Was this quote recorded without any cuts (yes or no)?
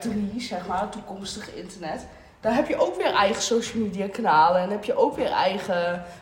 yes